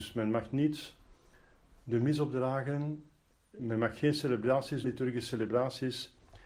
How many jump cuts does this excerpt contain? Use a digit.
2